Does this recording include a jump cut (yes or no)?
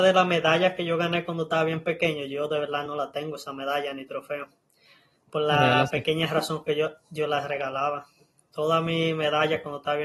no